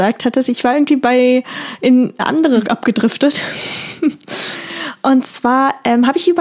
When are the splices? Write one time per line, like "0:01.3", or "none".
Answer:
0:02.2
0:02.7